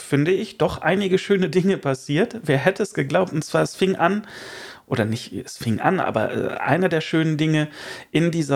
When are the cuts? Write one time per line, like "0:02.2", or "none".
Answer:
none